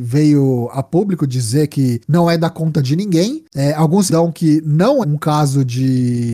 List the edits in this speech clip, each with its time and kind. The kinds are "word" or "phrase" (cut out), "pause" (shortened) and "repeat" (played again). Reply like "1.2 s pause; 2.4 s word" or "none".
4.1 s word; 5.0 s word